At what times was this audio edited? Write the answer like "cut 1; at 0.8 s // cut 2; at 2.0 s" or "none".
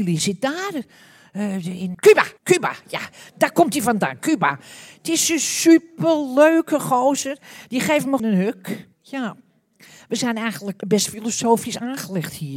cut 1; at 1.9 s // cut 2; at 2.4 s // cut 3; at 8.2 s // cut 4; at 8.9 s // cut 5; at 10.8 s